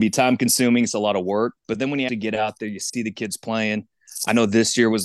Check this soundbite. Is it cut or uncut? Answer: cut